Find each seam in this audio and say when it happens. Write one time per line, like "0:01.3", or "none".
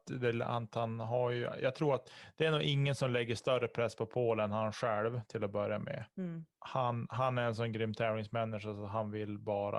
0:06.1